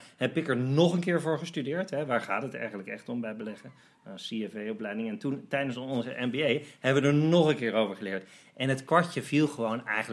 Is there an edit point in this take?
no; 0 cuts

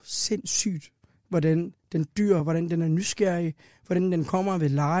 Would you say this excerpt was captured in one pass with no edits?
yes; 0 cuts

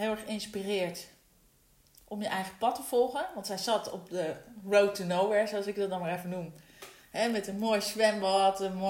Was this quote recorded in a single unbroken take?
yes; 0 cuts

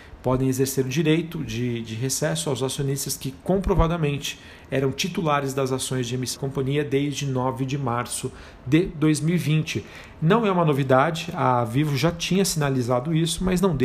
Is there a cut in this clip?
yes; 1 cut; at 6.4 s

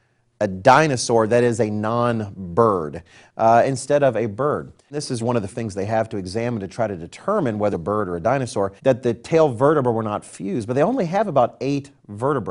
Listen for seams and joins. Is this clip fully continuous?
no; 4 cuts; at 5.2 s, 5.5 s, 7.7 s, 8.8 s

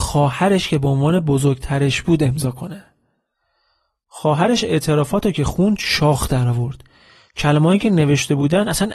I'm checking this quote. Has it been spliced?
no; 0 cuts

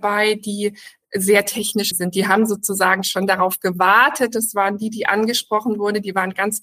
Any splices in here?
yes; 1 cut; at 1.9 s

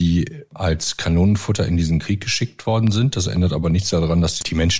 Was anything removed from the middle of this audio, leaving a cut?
no; 0 cuts

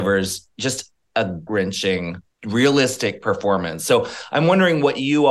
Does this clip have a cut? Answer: yes; 2 cuts; at 1.5 s, 2.2 s

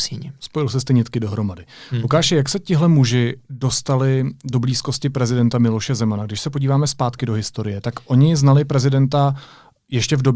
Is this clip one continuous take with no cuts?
yes; 0 cuts

